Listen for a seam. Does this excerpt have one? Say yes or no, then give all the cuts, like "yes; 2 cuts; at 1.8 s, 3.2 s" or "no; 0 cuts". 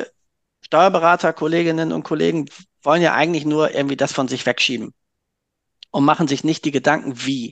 no; 0 cuts